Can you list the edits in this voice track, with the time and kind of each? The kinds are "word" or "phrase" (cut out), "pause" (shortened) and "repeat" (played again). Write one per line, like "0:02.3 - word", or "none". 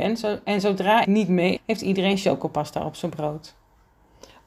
0:01.0 - word
0:01.6 - word